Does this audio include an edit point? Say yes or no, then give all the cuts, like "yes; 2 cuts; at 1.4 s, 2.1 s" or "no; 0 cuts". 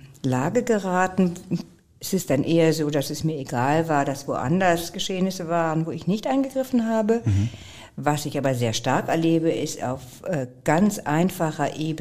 no; 0 cuts